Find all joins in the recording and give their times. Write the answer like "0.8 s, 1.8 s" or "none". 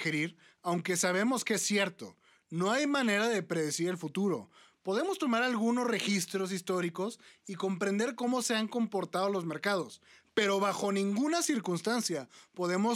none